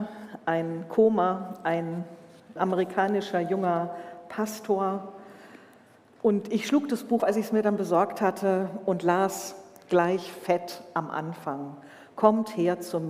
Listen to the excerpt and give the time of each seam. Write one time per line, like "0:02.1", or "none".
0:02.6
0:07.2